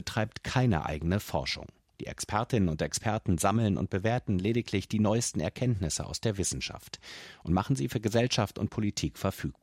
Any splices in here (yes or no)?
no